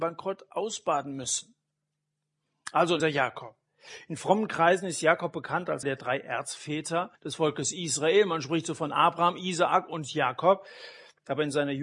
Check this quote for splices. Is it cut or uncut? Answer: cut